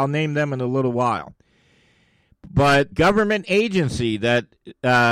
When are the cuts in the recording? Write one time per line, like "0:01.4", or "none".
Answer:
0:02.9